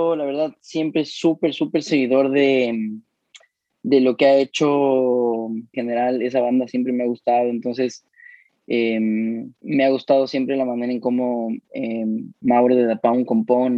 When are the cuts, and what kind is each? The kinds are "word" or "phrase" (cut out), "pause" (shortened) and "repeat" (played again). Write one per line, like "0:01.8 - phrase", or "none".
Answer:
0:05.7 - phrase
0:09.6 - pause